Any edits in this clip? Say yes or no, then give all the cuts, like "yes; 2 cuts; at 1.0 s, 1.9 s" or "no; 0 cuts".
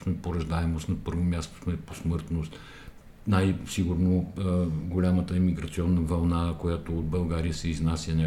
no; 0 cuts